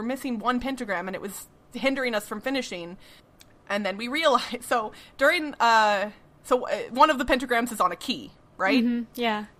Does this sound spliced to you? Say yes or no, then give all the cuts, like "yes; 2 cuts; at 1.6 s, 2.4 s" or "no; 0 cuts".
no; 0 cuts